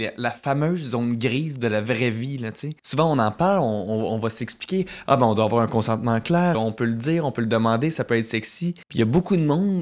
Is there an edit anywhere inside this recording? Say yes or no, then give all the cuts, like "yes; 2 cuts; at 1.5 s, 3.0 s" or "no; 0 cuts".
yes; 3 cuts; at 2.8 s, 6.5 s, 8.8 s